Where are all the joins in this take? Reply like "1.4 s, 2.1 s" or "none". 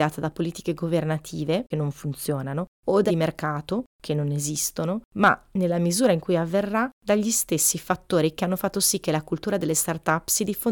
1.7 s, 2.7 s, 3.1 s, 5.1 s, 6.9 s, 8.4 s